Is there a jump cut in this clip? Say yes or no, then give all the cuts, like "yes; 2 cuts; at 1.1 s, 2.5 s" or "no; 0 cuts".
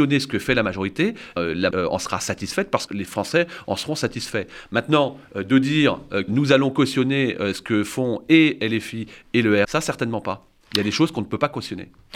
yes; 5 cuts; at 1.4 s, 1.7 s, 2.9 s, 6.3 s, 9.6 s